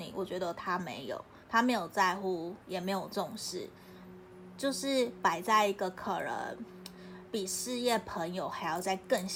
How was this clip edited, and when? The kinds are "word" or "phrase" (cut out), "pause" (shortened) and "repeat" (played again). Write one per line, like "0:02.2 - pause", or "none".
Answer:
0:01.4 - pause
0:02.6 - pause